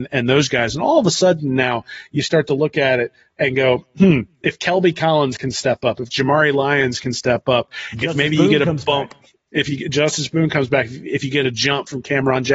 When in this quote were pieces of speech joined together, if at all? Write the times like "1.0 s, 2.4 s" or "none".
none